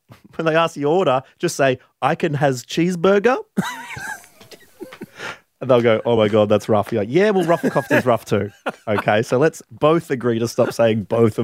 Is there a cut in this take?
no; 0 cuts

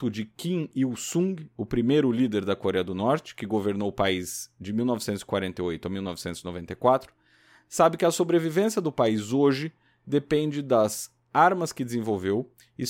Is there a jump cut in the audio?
no; 0 cuts

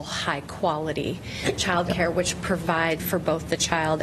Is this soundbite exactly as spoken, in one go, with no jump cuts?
no; 1 cut; at 3.0 s

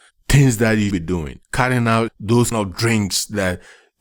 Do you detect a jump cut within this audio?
yes; 3 cuts; at 0.9 s, 1.4 s, 2.5 s

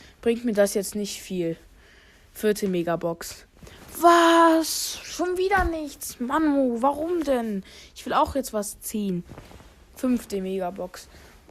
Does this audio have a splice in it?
no; 0 cuts

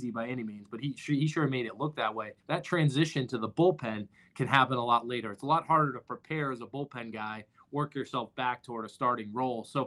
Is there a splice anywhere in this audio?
yes; 1 cut; at 2.4 s

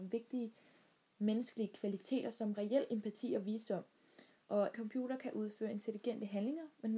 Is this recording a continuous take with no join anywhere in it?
no; 1 cut; at 4.7 s

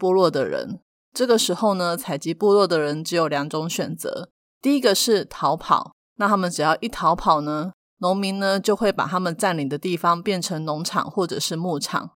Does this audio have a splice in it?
no; 0 cuts

